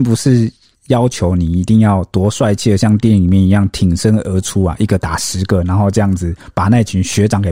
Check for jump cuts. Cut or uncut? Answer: uncut